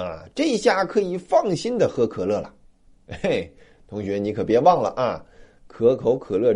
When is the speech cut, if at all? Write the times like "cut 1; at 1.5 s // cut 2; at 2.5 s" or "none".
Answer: none